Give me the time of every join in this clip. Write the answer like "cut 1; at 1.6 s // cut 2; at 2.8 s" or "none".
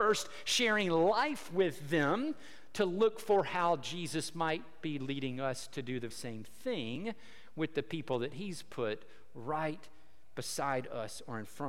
cut 1; at 6.1 s